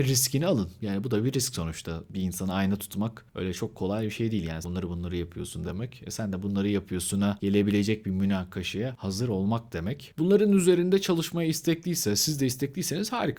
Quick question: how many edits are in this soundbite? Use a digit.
2